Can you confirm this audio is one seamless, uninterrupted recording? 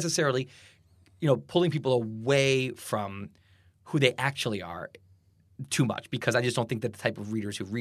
yes; 0 cuts

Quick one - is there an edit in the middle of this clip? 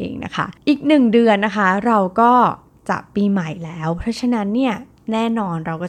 no; 0 cuts

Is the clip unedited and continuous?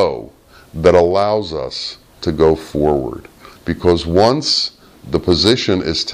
yes; 0 cuts

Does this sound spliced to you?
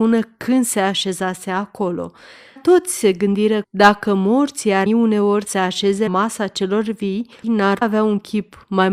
yes; 7 cuts; at 2.6 s, 3.6 s, 4.9 s, 5.5 s, 6.1 s, 7.4 s, 7.8 s

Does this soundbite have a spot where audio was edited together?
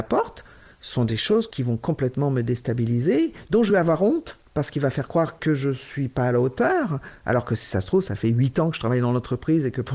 no; 0 cuts

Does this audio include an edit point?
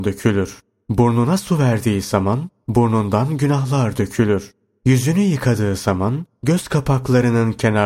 no; 0 cuts

